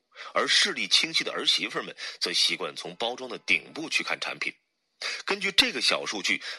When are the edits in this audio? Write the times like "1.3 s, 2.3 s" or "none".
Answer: none